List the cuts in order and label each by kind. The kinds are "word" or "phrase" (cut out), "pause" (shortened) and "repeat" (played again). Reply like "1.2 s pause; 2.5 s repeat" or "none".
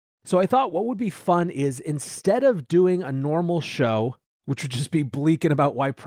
none